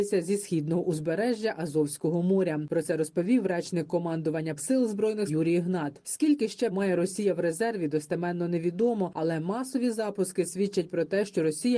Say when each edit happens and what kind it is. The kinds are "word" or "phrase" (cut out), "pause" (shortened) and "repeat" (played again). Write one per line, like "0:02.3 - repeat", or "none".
0:04.6 - word
0:05.3 - phrase
0:06.7 - word